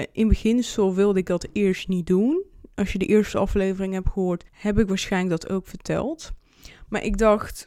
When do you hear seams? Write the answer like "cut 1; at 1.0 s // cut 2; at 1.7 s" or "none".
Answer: cut 1; at 4.5 s